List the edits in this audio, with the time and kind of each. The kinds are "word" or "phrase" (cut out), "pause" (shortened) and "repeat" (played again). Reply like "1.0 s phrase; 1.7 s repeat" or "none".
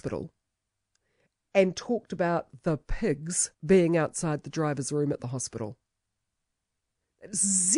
3.5 s pause